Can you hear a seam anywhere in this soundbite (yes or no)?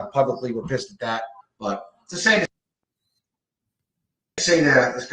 yes